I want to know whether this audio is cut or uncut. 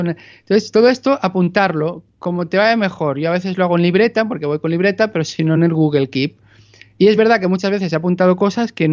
uncut